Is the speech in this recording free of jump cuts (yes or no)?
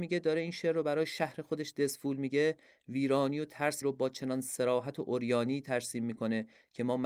no